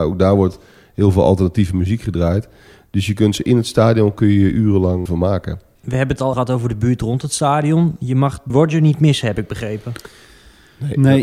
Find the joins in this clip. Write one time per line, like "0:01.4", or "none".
0:03.4
0:05.1
0:05.8
0:06.3
0:08.5